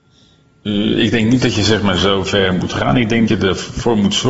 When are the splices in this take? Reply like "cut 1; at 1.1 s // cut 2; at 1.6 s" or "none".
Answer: cut 1; at 3.3 s